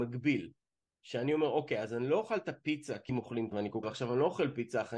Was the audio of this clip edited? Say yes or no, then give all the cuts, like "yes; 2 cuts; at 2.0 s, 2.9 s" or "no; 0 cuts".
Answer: yes; 3 cuts; at 3.1 s, 3.5 s, 3.8 s